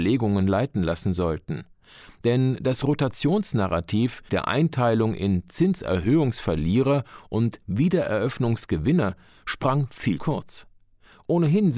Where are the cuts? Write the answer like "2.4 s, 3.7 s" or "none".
4.3 s, 10.2 s